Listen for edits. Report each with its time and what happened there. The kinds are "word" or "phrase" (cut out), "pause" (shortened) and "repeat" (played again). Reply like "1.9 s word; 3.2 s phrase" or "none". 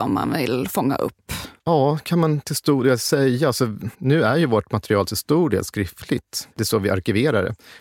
1.6 s pause; 3.9 s pause; 6.5 s pause